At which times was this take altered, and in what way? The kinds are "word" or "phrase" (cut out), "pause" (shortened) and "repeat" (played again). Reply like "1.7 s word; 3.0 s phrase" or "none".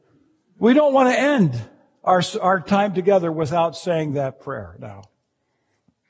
none